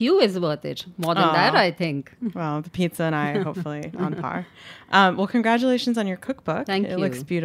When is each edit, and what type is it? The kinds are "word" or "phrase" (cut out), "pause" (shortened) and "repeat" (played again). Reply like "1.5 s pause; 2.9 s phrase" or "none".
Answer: none